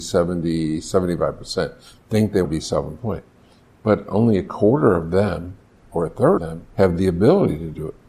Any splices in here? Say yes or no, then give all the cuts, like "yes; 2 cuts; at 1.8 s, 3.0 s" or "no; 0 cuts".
yes; 3 cuts; at 2.4 s, 6.4 s, 6.7 s